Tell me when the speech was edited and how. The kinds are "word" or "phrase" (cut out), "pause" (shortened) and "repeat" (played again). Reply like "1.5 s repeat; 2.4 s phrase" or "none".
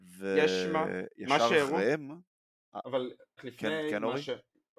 3.4 s word